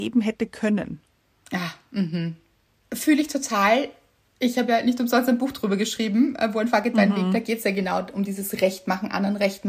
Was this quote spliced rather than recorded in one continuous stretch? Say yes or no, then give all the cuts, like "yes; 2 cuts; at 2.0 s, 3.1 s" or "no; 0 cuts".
no; 0 cuts